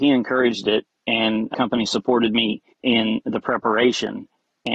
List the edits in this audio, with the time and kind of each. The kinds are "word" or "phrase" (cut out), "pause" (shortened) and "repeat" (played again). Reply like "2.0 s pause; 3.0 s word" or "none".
2.7 s pause